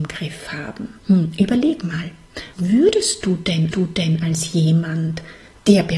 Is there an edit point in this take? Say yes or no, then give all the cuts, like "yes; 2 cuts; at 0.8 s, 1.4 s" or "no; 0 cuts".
yes; 3 cuts; at 1.0 s, 2.5 s, 3.7 s